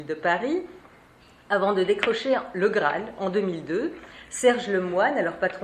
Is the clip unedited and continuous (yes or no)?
yes